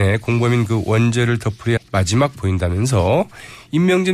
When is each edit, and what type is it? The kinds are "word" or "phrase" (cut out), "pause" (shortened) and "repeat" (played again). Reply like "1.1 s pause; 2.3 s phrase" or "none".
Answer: 1.8 s word; 2.4 s word